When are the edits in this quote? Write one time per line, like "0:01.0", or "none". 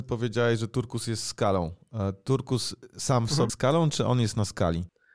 0:03.5

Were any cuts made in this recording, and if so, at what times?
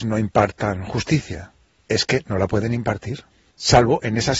none

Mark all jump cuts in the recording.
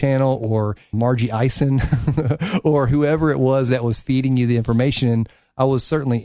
0:00.9

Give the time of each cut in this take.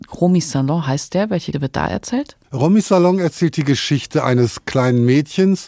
0:01.5
0:02.4

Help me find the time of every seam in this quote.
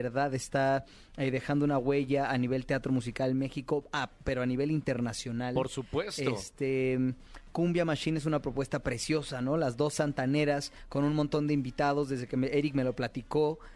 none

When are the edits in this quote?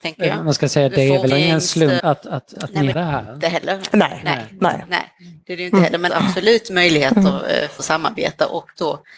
0:01.3
0:02.0
0:02.5
0:02.9
0:06.1
0:07.8

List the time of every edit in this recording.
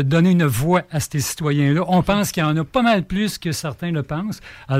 none

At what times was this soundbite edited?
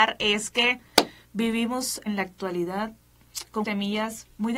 0:02.1
0:03.6

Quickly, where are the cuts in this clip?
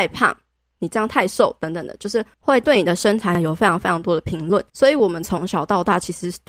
0:02.3
0:04.7

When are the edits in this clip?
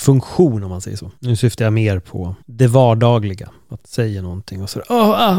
0:01.2
0:02.4
0:03.8

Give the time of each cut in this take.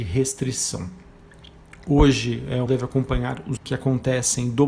0:02.7
0:03.6

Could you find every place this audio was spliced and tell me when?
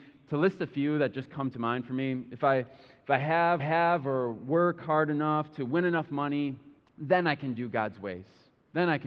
0:03.6
0:06.8

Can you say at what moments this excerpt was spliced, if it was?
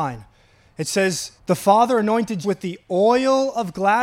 0:01.4
0:02.4

